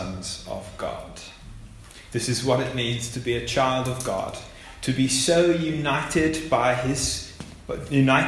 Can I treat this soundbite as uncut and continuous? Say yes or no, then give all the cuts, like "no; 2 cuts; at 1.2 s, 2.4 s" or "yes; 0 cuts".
yes; 0 cuts